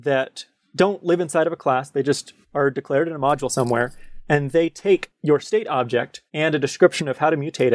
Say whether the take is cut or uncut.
cut